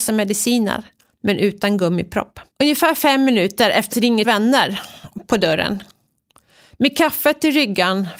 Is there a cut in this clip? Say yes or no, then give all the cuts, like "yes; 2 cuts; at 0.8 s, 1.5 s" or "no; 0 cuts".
yes; 4 cuts; at 1.1 s, 2.5 s, 3.9 s, 4.2 s